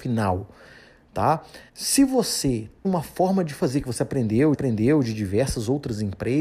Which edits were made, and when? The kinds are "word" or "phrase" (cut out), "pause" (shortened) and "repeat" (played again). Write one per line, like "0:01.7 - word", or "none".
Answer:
0:01.7 - pause
0:02.8 - word
0:04.5 - repeat